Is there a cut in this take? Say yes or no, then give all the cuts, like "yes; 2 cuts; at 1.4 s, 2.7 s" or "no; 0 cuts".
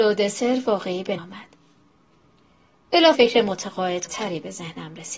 yes; 3 cuts; at 1.2 s, 3.1 s, 4.1 s